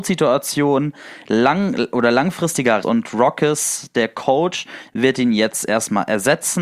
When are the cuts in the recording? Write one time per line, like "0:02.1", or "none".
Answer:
0:02.8